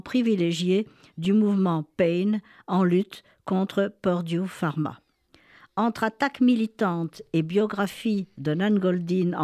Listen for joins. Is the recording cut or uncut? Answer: uncut